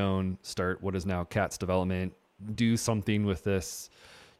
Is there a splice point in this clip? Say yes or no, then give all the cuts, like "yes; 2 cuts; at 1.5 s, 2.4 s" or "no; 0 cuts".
no; 0 cuts